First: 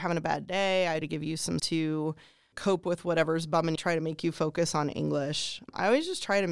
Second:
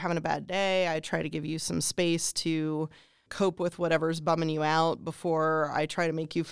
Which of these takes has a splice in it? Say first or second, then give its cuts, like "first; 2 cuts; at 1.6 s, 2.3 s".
first; 3 cuts; at 1.0 s, 1.6 s, 3.8 s